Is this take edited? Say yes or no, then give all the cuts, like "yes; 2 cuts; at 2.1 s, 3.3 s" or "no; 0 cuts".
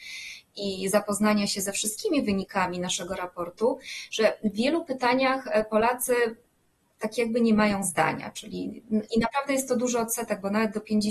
no; 0 cuts